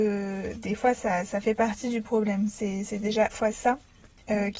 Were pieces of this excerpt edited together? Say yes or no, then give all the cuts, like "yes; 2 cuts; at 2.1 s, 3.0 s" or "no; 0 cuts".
yes; 1 cut; at 3.3 s